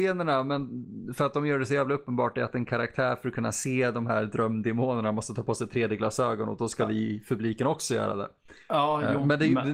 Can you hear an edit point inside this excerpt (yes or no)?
no